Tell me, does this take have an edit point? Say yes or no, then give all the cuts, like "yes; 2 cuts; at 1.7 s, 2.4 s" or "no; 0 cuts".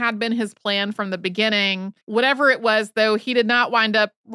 yes; 1 cut; at 2.0 s